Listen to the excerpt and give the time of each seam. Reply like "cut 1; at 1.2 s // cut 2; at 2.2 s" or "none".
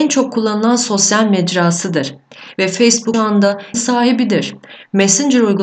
cut 1; at 3.1 s // cut 2; at 3.7 s